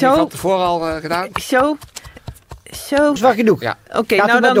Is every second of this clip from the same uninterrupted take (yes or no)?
no